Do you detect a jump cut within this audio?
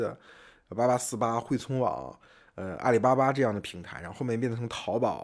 no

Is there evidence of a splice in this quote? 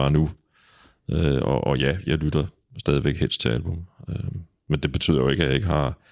no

